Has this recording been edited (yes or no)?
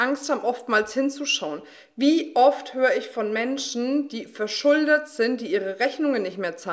no